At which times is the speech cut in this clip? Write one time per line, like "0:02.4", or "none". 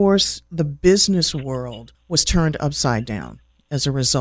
0:01.9